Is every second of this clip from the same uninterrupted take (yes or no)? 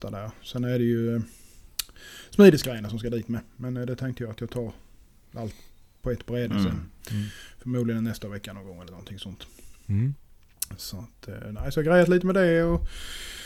yes